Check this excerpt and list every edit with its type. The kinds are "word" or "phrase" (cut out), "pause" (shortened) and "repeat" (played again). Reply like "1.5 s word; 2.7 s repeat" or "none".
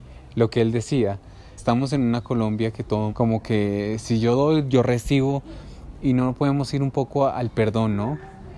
1.6 s word; 3.1 s phrase